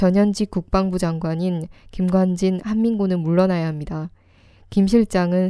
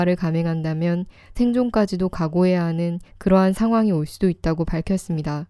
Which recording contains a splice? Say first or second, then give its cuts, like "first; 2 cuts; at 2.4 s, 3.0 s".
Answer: second; 2 cuts; at 1.3 s, 3.0 s